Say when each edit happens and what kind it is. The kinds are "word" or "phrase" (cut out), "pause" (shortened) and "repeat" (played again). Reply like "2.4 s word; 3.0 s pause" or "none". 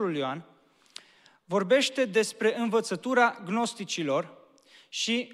none